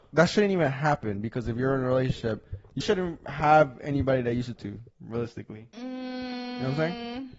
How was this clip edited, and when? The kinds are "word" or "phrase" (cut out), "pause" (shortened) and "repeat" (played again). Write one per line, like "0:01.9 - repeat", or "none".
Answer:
0:02.8 - word
0:04.6 - word
0:04.9 - pause